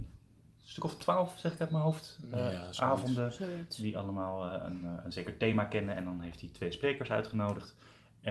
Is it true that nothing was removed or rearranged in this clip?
yes; 0 cuts

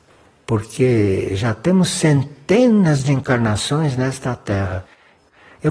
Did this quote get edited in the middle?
no; 0 cuts

